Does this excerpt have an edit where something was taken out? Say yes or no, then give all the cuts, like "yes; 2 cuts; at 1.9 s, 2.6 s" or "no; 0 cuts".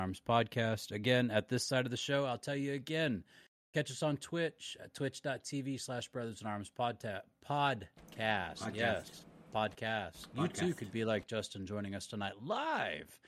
no; 0 cuts